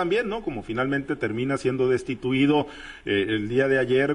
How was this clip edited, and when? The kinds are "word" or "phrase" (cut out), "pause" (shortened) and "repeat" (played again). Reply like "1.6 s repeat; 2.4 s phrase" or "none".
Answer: none